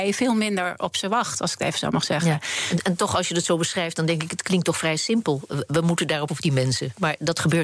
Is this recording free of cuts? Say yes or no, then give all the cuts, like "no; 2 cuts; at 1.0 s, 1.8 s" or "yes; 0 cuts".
no; 1 cut; at 6.3 s